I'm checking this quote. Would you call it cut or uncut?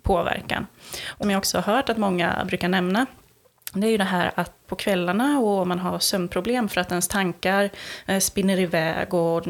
cut